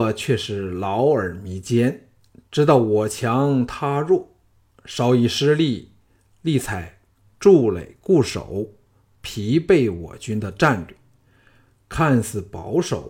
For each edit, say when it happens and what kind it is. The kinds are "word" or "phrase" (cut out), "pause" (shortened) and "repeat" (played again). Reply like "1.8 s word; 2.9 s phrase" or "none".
none

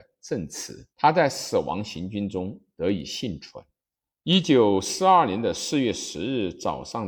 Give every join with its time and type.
0.9 s pause; 4.0 s pause

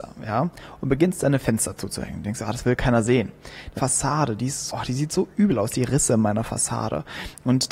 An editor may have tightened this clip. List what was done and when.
3.8 s phrase; 4.7 s word

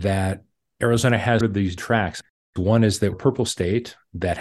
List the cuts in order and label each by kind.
1.4 s word; 1.8 s word; 3.1 s word

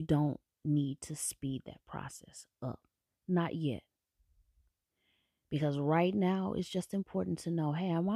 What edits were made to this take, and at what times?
none

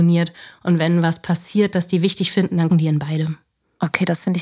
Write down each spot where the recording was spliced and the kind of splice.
2.7 s word

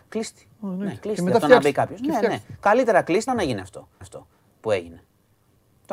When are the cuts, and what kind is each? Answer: 3.3 s word; 4.0 s repeat

